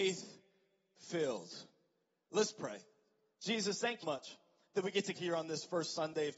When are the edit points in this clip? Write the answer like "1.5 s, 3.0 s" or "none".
4.0 s, 5.1 s